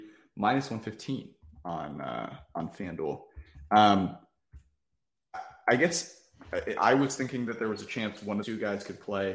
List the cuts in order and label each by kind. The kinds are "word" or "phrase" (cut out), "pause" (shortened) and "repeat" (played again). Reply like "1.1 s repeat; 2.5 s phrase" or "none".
8.4 s phrase

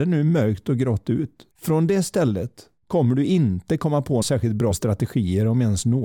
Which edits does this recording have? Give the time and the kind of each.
1.5 s pause; 2.8 s pause; 4.2 s word; 4.7 s word

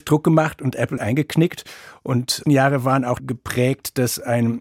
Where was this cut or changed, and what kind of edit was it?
1.0 s word; 2.4 s phrase; 3.2 s word

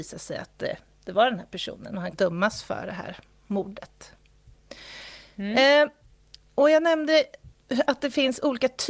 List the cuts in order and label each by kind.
2.1 s word

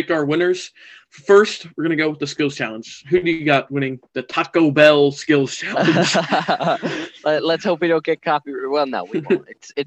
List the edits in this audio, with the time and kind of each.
4.1 s pause

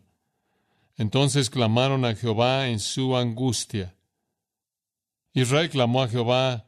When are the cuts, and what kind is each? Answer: none

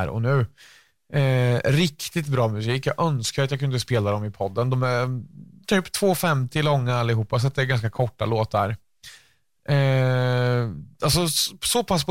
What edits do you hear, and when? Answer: none

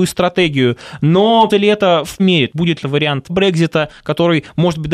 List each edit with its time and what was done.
1.5 s word; 2.2 s word; 2.5 s word; 2.8 s word; 3.3 s word

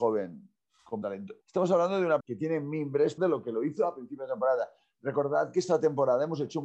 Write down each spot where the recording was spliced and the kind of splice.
1.0 s word; 1.4 s pause; 2.2 s word; 3.2 s phrase

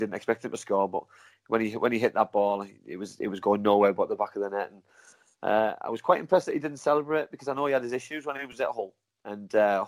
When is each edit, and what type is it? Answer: none

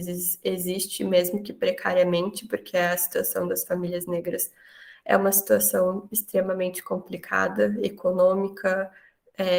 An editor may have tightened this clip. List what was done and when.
none

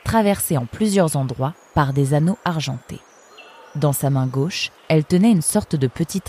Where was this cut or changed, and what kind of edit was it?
4.8 s pause

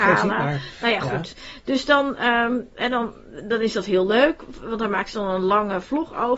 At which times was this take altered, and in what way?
none

